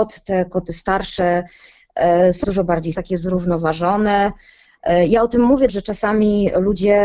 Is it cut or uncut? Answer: cut